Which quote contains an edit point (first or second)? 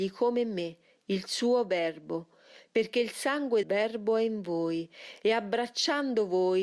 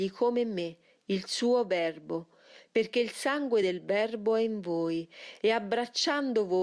first